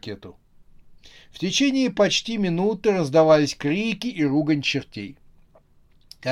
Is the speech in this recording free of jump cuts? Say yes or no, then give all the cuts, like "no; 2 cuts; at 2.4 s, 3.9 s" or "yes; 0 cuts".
yes; 0 cuts